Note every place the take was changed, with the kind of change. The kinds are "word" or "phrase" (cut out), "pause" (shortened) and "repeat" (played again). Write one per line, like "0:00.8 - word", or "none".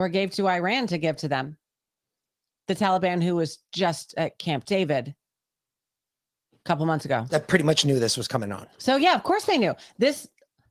none